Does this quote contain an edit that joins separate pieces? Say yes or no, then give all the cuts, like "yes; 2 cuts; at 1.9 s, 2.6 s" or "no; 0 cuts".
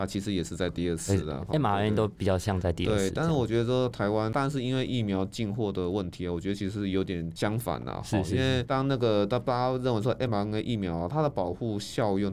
no; 0 cuts